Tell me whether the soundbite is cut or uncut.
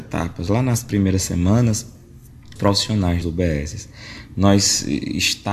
cut